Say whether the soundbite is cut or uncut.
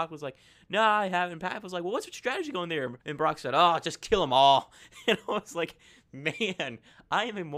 cut